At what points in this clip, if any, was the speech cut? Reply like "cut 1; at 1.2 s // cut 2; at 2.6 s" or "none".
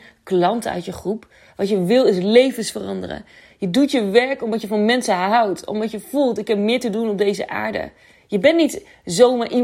none